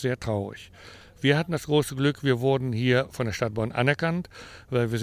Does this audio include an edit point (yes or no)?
no